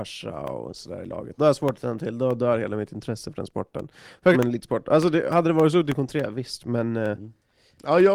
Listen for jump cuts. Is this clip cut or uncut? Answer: cut